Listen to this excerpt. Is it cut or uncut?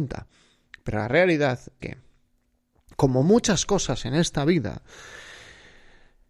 cut